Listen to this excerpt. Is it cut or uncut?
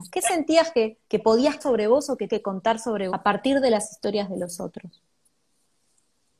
cut